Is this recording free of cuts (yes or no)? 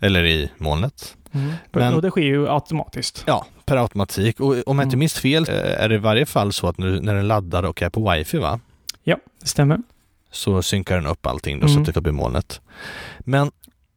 no